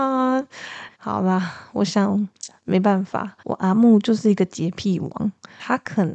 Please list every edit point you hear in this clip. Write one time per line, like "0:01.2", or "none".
0:00.9
0:03.4